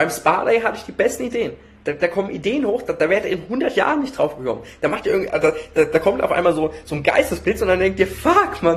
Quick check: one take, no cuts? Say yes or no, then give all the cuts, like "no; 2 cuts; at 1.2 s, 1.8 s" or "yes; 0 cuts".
yes; 0 cuts